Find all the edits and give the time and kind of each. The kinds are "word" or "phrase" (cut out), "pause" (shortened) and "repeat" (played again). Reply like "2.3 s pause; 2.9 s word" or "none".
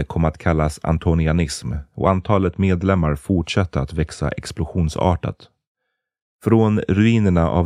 none